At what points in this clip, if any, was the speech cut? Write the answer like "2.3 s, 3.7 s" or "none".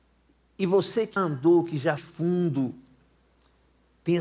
1.2 s, 2.0 s